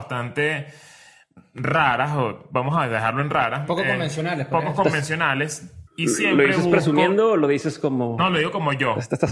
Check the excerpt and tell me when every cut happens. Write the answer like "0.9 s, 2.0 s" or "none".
5.9 s

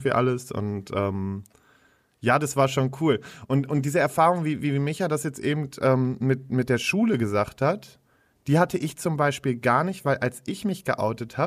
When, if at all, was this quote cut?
none

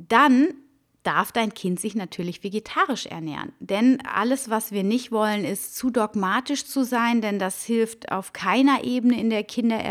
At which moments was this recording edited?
none

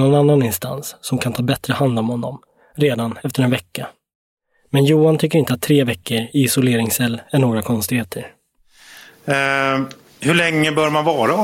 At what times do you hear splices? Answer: none

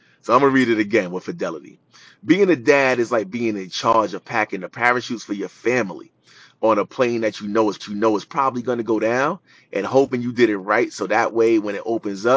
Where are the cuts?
7.8 s

